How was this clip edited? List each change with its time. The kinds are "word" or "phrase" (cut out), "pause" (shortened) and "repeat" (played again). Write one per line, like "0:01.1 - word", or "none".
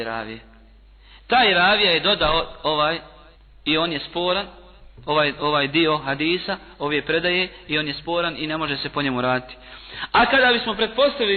0:03.4 - pause